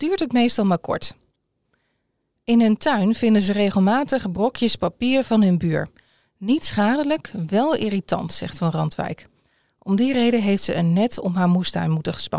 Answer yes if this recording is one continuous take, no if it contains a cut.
yes